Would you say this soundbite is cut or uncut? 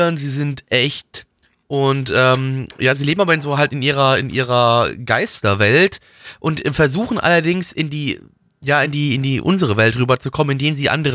uncut